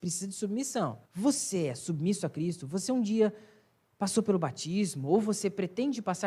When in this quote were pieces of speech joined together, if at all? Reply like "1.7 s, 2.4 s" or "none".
1.0 s